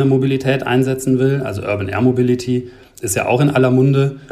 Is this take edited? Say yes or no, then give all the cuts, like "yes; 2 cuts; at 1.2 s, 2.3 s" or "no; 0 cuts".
no; 0 cuts